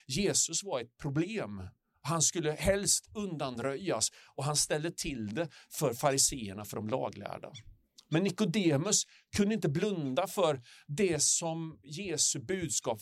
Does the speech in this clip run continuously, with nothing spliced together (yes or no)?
yes